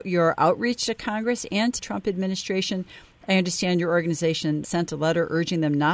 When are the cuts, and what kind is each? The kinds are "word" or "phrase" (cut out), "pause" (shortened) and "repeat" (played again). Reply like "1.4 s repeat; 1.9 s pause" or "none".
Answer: 1.8 s word; 4.6 s word